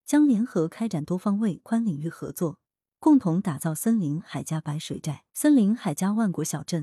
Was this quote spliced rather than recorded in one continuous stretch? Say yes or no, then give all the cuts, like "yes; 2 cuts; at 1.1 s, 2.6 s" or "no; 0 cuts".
yes; 1 cut; at 5.3 s